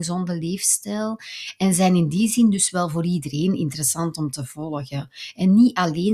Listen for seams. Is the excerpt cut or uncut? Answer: uncut